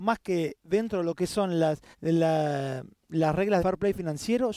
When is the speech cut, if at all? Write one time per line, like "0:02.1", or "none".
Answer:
0:01.9
0:03.6